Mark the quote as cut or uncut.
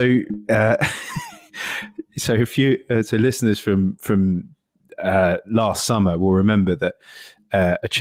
uncut